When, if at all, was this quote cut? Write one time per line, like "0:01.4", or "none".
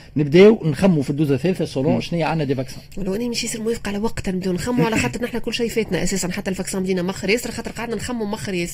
none